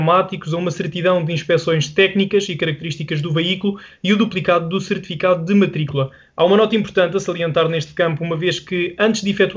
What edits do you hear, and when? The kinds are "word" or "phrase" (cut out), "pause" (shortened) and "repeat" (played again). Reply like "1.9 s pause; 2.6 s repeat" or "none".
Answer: none